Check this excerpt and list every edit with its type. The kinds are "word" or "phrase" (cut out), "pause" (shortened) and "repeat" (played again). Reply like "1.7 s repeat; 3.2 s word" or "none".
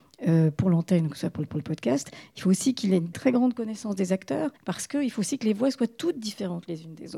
1.5 s repeat; 3.1 s word; 4.6 s pause